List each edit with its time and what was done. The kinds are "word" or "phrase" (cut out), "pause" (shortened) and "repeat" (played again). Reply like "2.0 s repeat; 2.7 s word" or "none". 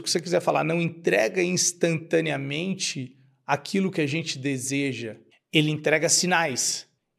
none